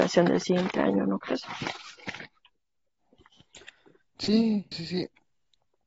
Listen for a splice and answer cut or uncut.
cut